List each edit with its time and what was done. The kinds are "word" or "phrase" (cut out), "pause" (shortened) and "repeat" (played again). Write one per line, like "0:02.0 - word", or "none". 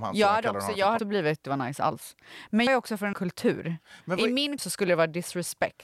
0:01.0 - word
0:01.4 - phrase
0:02.7 - word
0:03.1 - word
0:04.6 - word